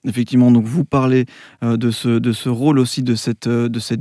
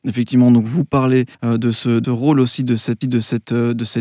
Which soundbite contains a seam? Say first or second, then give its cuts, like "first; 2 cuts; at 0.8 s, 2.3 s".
second; 3 cuts; at 1.3 s, 2.0 s, 3.0 s